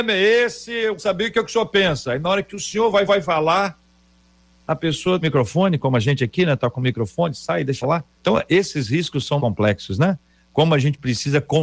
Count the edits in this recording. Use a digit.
6